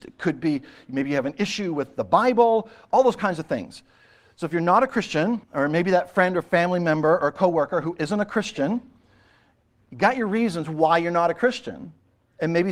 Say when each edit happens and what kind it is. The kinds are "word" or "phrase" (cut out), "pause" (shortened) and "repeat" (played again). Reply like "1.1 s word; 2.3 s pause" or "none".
5.4 s pause